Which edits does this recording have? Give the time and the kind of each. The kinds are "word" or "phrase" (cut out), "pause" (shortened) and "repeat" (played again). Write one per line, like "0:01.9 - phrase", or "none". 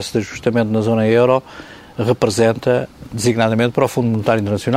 none